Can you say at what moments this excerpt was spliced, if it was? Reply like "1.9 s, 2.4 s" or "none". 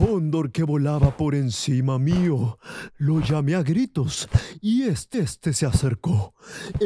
5.1 s